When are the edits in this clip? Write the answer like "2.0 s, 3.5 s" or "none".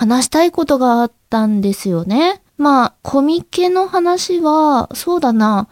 2.5 s, 3.0 s